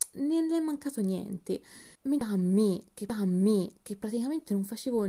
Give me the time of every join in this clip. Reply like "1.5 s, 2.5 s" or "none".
1.9 s, 3.1 s